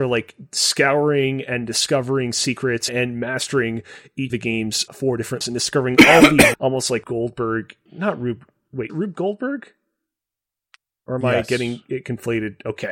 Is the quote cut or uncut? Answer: cut